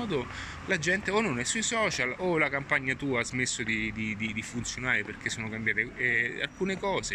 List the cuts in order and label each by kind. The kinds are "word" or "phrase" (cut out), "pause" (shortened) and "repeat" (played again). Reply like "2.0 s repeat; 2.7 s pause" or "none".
none